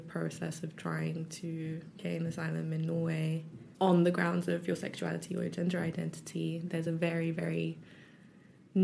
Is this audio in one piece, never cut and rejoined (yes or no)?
yes